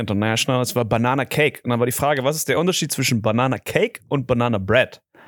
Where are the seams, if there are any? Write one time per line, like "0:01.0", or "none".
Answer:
none